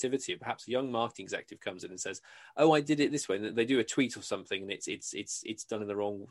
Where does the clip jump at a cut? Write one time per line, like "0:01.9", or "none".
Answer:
none